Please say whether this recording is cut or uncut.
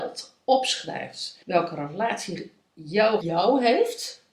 cut